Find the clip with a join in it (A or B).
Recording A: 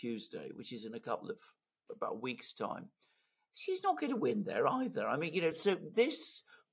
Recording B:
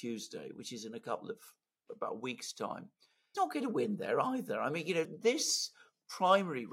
B